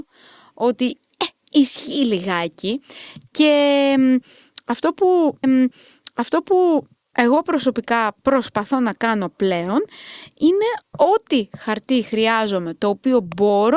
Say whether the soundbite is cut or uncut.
cut